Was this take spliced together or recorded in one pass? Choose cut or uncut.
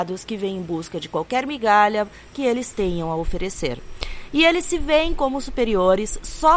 uncut